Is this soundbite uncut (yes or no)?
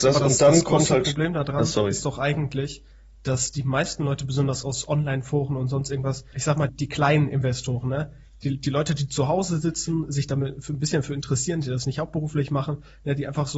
no